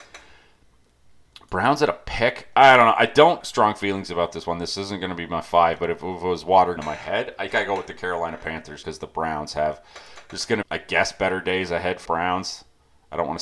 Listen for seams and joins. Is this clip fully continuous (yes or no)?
no